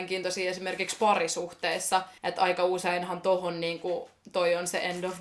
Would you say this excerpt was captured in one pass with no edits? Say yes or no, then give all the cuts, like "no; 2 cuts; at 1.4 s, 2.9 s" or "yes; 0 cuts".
no; 1 cut; at 2.2 s